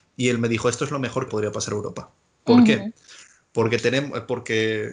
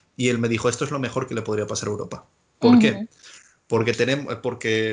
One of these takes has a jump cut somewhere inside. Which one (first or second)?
first